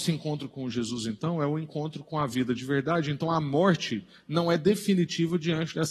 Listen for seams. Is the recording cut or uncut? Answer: uncut